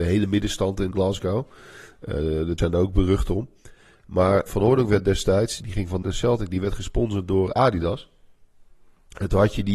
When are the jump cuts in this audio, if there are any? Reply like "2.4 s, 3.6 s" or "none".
0.9 s, 2.6 s, 4.5 s, 5.6 s, 6.0 s